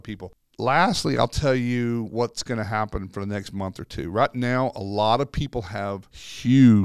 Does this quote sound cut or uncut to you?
uncut